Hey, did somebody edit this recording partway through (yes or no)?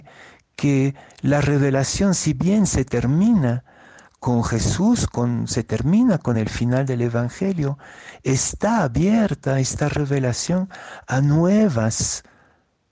no